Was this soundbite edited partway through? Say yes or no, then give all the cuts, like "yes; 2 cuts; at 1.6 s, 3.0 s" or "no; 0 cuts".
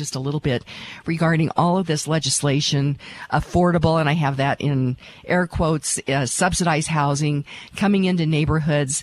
no; 0 cuts